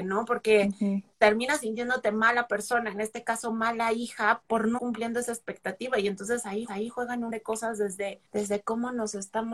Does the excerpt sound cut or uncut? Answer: cut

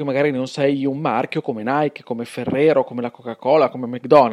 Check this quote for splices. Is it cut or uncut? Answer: uncut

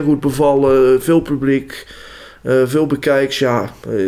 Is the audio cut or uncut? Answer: uncut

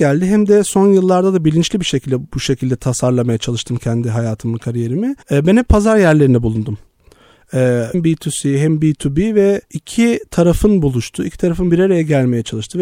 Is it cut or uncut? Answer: cut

